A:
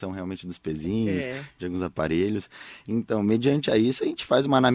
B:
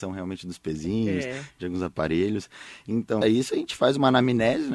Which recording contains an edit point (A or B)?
B